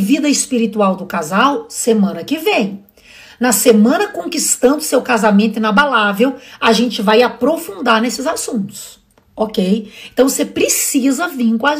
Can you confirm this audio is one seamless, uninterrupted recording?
yes; 0 cuts

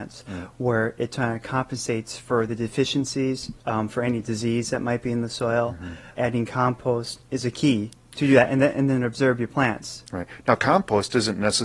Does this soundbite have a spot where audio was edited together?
no; 0 cuts

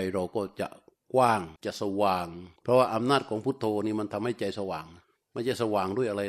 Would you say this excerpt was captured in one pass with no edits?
no; 3 cuts; at 1.6 s, 2.6 s, 5.0 s

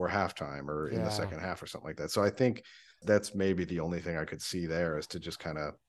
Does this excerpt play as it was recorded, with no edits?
no; 1 cut; at 3.0 s

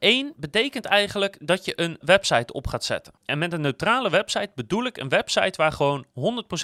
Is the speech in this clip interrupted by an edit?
yes; 2 cuts; at 2.0 s, 3.2 s

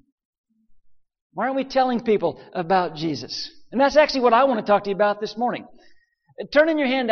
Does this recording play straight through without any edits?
yes; 0 cuts

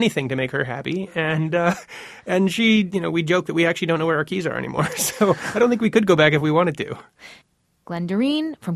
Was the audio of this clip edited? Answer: no; 0 cuts

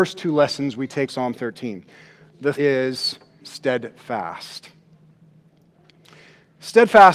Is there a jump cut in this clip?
yes; 3 cuts; at 1.1 s, 2.5 s, 3.4 s

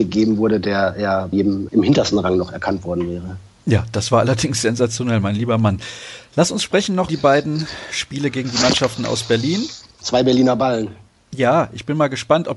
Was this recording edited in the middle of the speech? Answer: yes; 2 cuts; at 1.3 s, 7.1 s

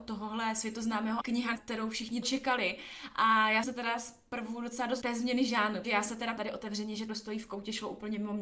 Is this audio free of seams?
no; 8 cuts; at 1.2 s, 1.5 s, 2.2 s, 3.6 s, 5.0 s, 5.8 s, 6.4 s, 7.1 s

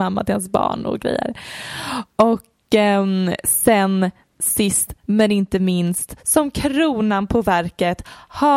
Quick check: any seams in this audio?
no; 0 cuts

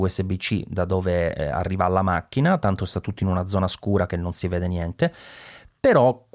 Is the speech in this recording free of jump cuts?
yes; 0 cuts

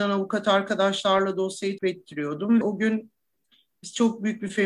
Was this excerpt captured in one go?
no; 2 cuts; at 1.8 s, 2.6 s

